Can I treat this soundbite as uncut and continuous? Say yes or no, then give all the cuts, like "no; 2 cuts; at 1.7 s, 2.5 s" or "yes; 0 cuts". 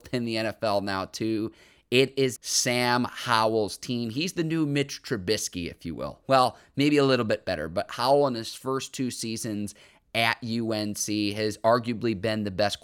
no; 1 cut; at 2.4 s